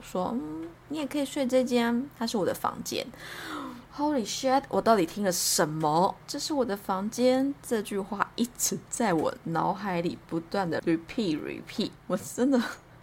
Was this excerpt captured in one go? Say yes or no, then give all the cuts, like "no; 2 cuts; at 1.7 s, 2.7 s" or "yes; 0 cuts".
no; 2 cuts; at 3.9 s, 11.4 s